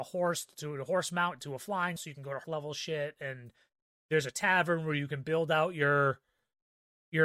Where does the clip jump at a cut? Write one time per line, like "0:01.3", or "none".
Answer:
0:02.0
0:02.4